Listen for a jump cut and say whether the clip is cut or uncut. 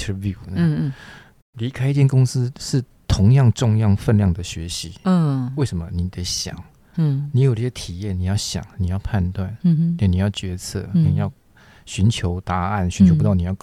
uncut